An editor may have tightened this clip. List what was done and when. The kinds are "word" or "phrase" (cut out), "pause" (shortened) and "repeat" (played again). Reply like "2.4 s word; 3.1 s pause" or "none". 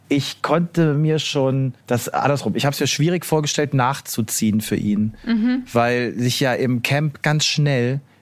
1.8 s pause; 7.2 s word